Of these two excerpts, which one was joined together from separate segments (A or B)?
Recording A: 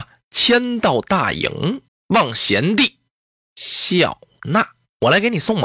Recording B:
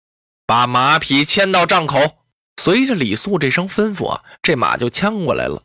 A